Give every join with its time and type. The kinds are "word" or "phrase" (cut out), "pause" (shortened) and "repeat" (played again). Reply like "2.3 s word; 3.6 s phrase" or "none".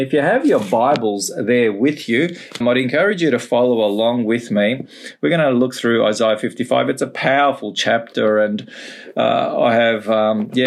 2.6 s word